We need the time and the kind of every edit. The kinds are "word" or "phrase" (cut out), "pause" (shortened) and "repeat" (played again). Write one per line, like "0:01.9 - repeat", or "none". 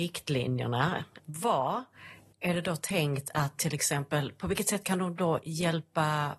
0:01.2 - word